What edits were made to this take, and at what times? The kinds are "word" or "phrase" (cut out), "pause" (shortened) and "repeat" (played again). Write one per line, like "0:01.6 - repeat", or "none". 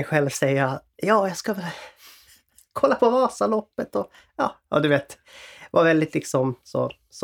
none